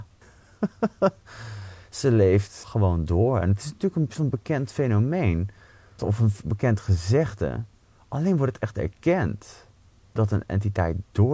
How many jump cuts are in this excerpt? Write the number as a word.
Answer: zero